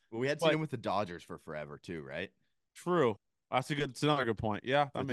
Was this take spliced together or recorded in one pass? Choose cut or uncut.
uncut